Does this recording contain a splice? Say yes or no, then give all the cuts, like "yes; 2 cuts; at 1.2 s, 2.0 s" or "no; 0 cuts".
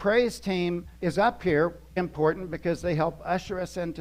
yes; 2 cuts; at 1.0 s, 2.0 s